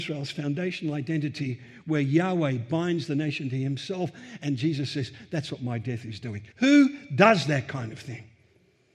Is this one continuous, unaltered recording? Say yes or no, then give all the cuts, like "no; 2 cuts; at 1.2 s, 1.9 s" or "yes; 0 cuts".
no; 1 cut; at 6.5 s